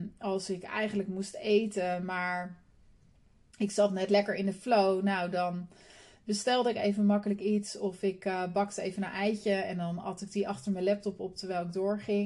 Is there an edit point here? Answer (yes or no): no